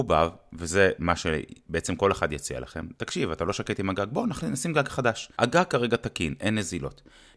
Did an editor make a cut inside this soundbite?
yes; 1 cut; at 5.3 s

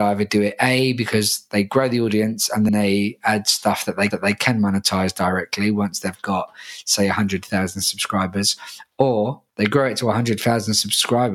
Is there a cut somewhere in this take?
yes; 3 cuts; at 2.7 s, 4.1 s, 9.5 s

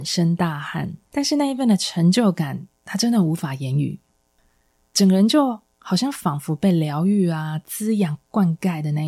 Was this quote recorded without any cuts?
no; 1 cut; at 1.1 s

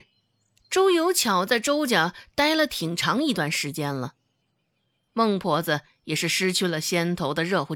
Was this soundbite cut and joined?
no; 0 cuts

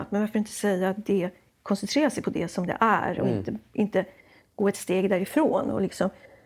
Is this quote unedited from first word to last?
yes; 0 cuts

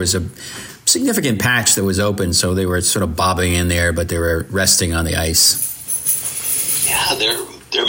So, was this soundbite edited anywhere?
no; 0 cuts

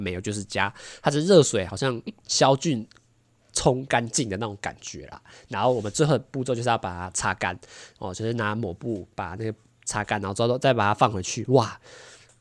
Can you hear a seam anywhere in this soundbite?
no; 0 cuts

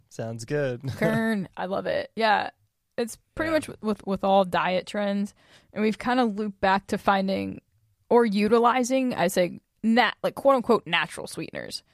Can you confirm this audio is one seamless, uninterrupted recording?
yes; 0 cuts

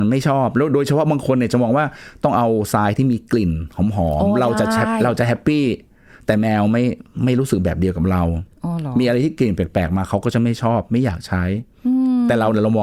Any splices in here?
no; 0 cuts

